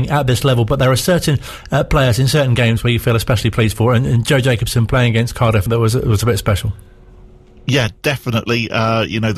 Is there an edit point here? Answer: yes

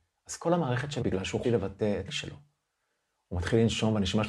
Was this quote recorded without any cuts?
no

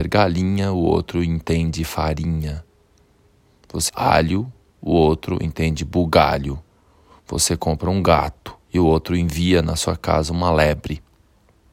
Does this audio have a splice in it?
yes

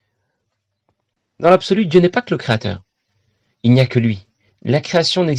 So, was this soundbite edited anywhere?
no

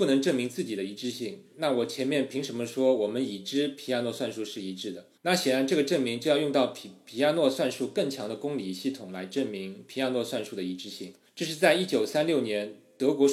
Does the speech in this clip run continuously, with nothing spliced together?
no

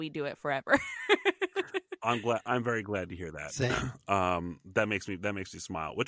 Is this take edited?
no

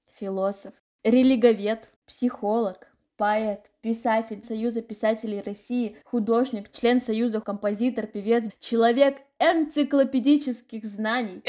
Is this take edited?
yes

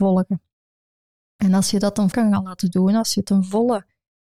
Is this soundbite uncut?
no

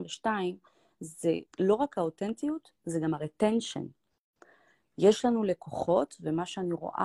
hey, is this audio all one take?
no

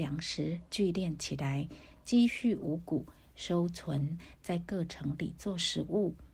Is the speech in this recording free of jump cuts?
yes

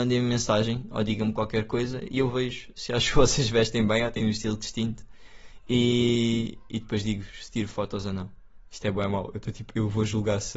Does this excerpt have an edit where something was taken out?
yes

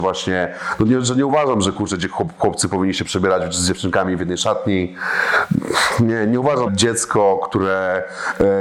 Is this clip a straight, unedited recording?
no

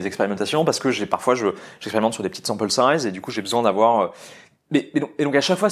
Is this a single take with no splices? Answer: yes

